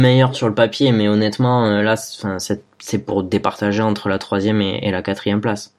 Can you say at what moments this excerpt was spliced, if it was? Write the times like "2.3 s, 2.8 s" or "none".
none